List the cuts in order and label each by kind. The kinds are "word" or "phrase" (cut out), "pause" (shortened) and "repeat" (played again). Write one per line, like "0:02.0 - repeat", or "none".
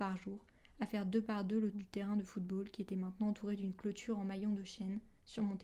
0:01.7 - word